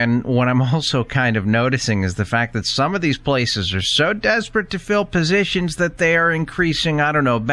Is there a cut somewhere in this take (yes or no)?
no